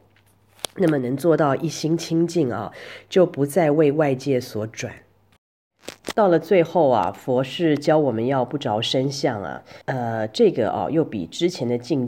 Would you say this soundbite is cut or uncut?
cut